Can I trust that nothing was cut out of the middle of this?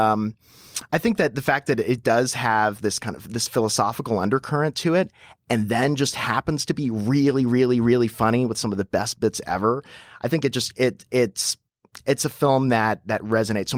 yes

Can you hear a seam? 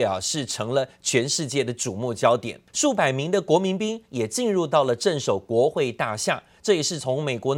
yes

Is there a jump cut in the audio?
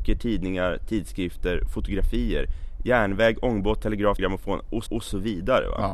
yes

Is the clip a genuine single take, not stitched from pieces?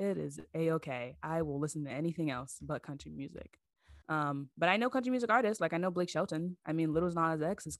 no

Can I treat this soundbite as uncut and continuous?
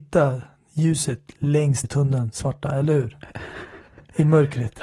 no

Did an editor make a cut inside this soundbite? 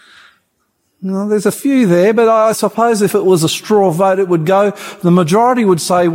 no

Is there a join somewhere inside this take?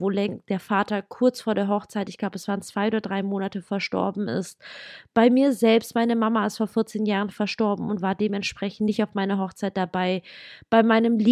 no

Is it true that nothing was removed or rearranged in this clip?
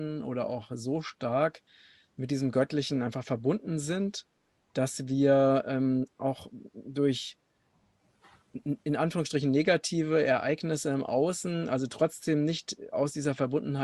yes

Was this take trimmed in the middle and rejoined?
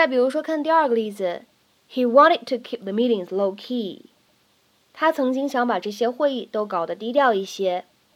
no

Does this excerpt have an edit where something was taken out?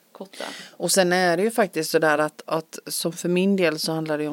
no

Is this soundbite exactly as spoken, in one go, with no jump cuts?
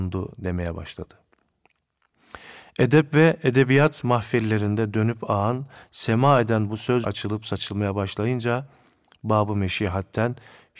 no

